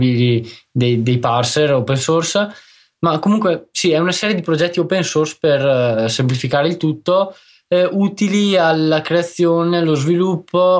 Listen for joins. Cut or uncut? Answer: uncut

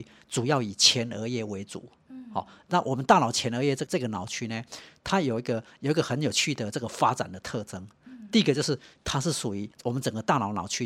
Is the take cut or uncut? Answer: cut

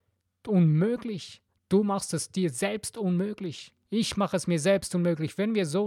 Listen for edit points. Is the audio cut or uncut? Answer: cut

